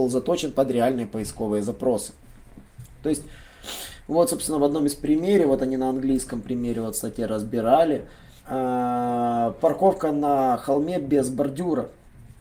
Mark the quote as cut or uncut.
cut